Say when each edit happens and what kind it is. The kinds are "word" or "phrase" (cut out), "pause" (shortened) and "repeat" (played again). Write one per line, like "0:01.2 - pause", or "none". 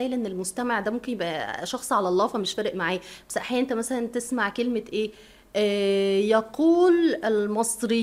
none

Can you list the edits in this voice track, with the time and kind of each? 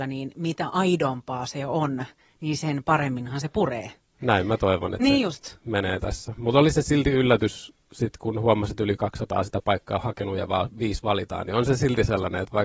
none

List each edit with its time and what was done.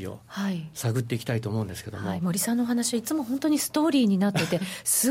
none

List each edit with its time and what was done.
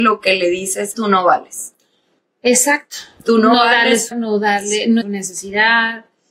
0:00.9 - word
0:04.1 - word
0:05.0 - word

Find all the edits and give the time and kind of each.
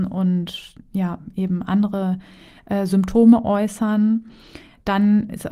none

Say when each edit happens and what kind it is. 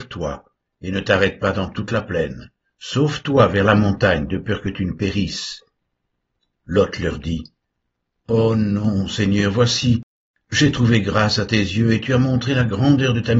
none

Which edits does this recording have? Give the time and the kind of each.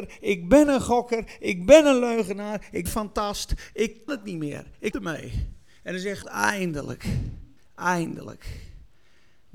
0:02.9 - phrase
0:04.1 - word
0:04.9 - word
0:06.2 - word
0:07.6 - pause

